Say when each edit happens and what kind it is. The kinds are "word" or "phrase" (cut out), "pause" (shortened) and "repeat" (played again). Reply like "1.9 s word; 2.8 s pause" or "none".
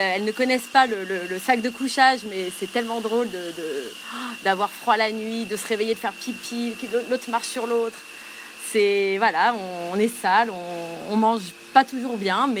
none